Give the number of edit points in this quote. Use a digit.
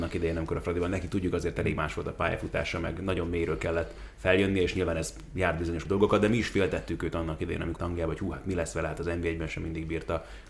2